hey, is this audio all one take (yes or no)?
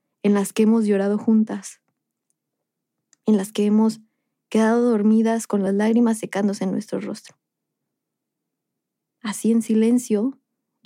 yes